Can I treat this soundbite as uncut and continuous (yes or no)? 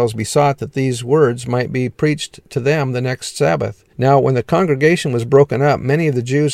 no